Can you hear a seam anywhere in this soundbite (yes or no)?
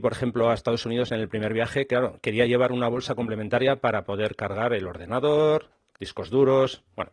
yes